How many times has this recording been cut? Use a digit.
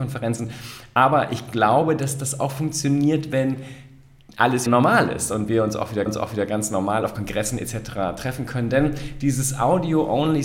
2